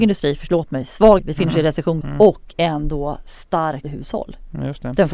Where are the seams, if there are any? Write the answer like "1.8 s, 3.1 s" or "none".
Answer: 1.2 s, 2.0 s, 3.8 s